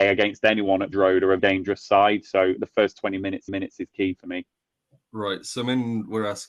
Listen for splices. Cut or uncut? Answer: cut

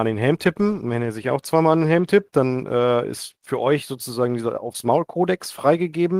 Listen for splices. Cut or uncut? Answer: uncut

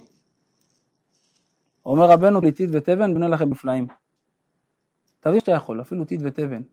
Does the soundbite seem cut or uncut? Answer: cut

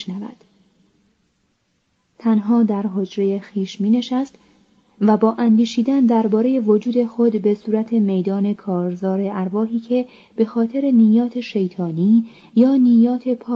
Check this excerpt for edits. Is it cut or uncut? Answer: uncut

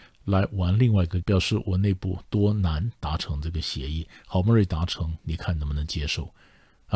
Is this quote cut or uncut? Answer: cut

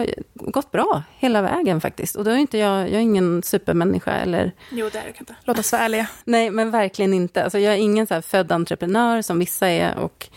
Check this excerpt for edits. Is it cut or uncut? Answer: cut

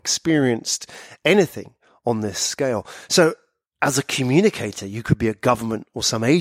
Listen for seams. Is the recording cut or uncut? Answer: uncut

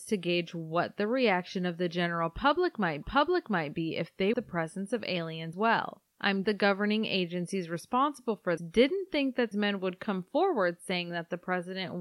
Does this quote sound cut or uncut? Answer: cut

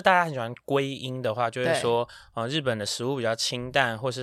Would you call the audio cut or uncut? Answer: uncut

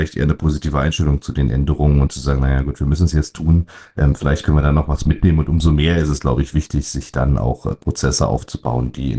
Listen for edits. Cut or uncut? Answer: uncut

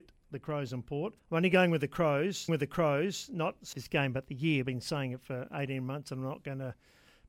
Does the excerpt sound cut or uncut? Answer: cut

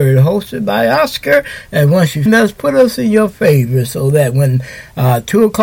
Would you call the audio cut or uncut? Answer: cut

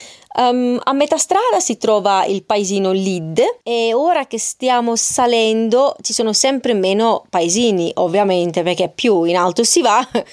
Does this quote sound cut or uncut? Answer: cut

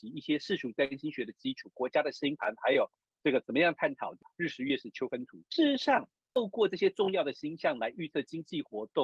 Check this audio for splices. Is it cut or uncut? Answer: uncut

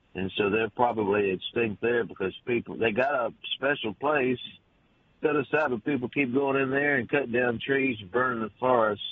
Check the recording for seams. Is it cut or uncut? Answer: uncut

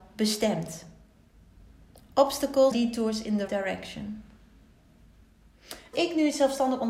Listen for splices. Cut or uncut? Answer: cut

